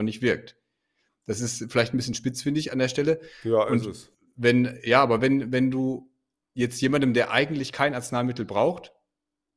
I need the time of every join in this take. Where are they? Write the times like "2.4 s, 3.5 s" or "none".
none

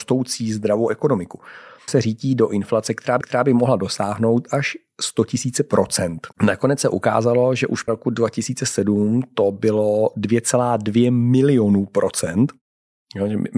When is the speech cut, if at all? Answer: 1.9 s, 3.2 s, 6.3 s, 7.9 s

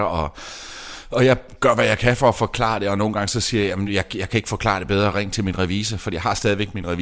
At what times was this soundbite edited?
none

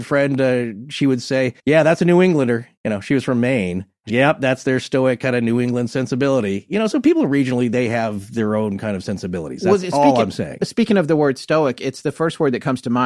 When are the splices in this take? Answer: 1.6 s, 2.8 s, 4.1 s

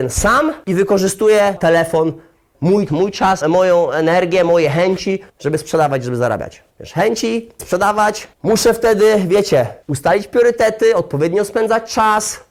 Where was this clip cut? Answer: 1.6 s, 2.9 s, 3.4 s, 5.3 s, 6.7 s, 7.6 s, 8.3 s, 9.8 s

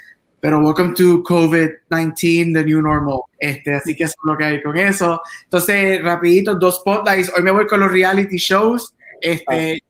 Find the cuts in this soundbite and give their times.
3.3 s

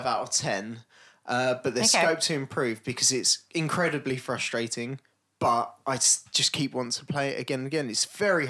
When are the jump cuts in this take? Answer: none

